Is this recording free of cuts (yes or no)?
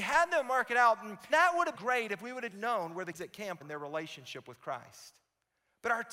no